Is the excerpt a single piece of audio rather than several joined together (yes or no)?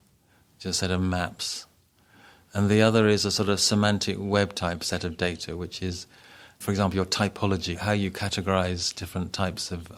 yes